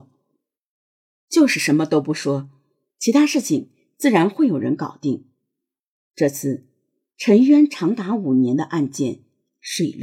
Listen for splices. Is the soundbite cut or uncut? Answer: uncut